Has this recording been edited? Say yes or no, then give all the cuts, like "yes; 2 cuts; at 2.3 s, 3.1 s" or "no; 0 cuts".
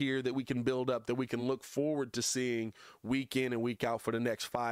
no; 0 cuts